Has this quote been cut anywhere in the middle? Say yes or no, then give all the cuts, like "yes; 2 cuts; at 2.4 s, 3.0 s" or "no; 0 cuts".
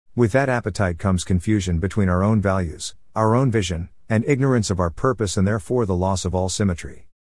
no; 0 cuts